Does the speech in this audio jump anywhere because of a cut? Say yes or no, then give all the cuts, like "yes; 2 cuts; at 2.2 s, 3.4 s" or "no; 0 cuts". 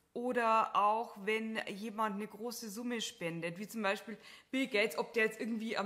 no; 0 cuts